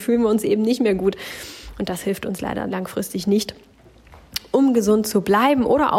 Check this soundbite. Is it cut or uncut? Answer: uncut